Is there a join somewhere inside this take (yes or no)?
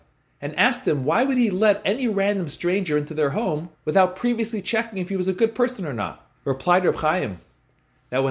yes